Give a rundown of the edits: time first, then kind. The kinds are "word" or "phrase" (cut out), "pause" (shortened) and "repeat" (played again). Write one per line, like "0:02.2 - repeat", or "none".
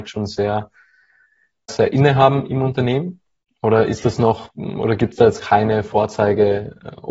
0:01.7 - word